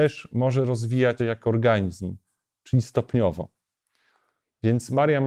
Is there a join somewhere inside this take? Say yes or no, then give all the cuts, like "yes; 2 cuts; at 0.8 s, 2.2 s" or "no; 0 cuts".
yes; 1 cut; at 1.2 s